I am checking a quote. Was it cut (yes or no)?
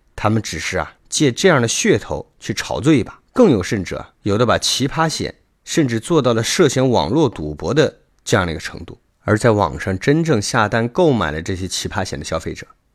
yes